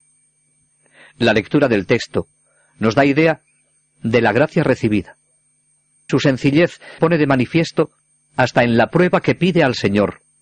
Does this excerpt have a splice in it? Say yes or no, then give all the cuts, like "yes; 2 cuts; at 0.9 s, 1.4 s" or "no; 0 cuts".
yes; 2 cuts; at 6.1 s, 7.0 s